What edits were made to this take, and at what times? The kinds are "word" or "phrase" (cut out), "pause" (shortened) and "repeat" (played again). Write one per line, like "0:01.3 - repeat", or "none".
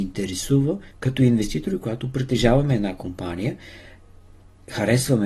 0:00.9 - pause